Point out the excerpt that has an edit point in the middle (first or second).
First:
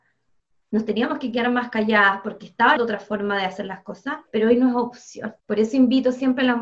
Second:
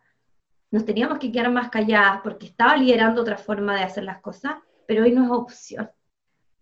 first